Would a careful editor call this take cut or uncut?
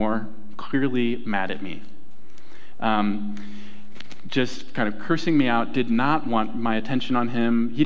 uncut